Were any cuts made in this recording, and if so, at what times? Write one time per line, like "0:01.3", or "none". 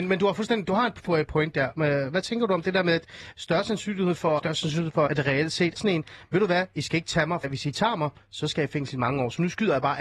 0:04.4
0:05.1
0:05.8
0:07.4